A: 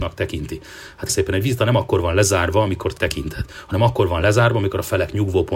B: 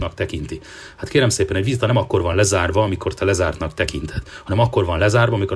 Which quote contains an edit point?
A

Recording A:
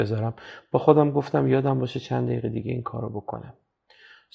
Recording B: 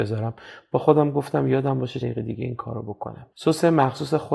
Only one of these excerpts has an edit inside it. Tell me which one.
B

